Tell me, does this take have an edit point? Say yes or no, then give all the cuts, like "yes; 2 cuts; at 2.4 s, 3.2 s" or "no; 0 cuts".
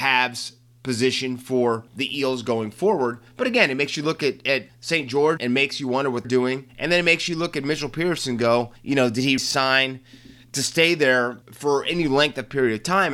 yes; 8 cuts; at 1.9 s, 4.7 s, 5.4 s, 6.2 s, 6.7 s, 8.8 s, 9.4 s, 11.4 s